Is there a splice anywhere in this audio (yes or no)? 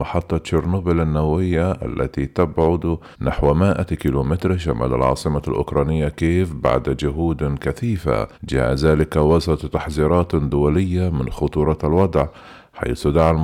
yes